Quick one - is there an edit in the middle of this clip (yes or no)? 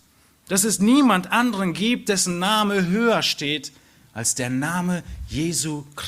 no